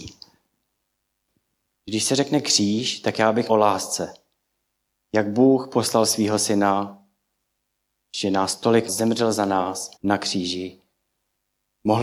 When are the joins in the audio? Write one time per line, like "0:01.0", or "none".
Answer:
0:03.5
0:08.9
0:10.0

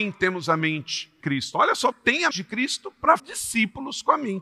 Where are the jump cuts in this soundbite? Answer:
0:01.2
0:01.9
0:02.3
0:03.2

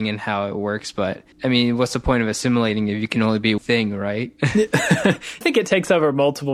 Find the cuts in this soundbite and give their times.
0:01.3
0:03.6
0:05.4

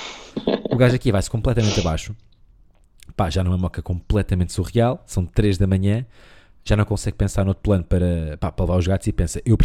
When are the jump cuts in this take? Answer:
none

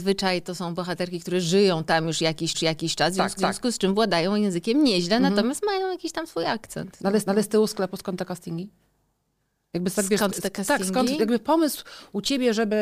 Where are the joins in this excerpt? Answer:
0:02.5
0:03.4
0:07.3

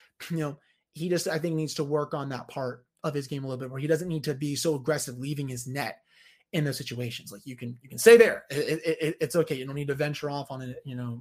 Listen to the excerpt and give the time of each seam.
none

